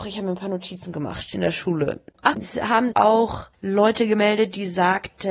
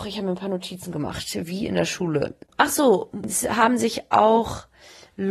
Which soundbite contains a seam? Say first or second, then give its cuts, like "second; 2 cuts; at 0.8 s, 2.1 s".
first; 4 cuts; at 1.3 s, 2.3 s, 2.9 s, 3.5 s